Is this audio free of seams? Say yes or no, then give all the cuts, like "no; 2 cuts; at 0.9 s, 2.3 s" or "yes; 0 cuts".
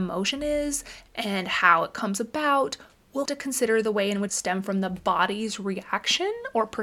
no; 2 cuts; at 3.3 s, 4.3 s